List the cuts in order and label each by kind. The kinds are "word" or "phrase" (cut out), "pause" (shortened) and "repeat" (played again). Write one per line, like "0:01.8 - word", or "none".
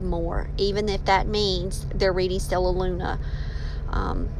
none